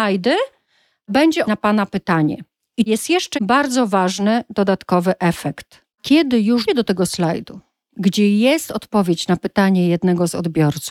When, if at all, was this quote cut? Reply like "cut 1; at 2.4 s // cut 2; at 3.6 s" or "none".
cut 1; at 1.4 s // cut 2; at 2.9 s // cut 3; at 3.3 s // cut 4; at 5.9 s // cut 5; at 6.7 s